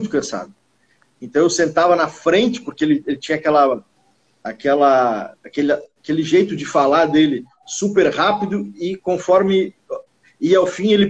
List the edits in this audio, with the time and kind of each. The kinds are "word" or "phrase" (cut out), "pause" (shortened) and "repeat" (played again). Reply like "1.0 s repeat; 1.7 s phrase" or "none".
none